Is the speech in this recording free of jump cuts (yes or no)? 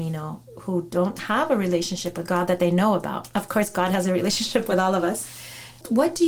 yes